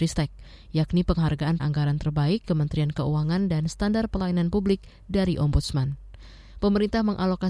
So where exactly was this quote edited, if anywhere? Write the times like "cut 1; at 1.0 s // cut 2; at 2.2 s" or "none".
cut 1; at 1.6 s // cut 2; at 2.4 s